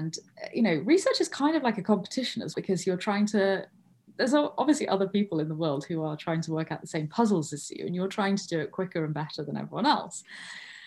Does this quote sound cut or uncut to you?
cut